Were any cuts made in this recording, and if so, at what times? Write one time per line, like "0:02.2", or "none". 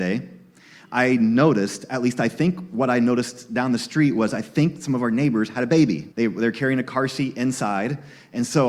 0:06.1